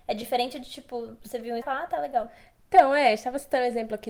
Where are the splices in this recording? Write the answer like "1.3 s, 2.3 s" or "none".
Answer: 1.6 s